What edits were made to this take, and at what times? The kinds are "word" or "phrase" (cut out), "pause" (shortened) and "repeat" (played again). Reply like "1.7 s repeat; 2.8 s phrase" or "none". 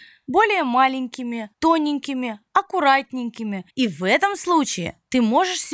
1.5 s pause; 3.7 s pause